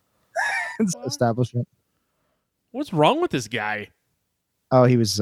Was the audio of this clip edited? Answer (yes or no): yes